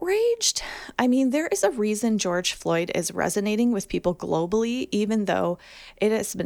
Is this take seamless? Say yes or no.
yes